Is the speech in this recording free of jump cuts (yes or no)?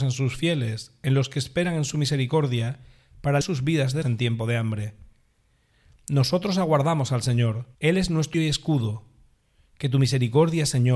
no